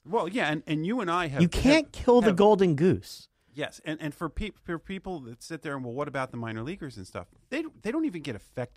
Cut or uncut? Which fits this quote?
uncut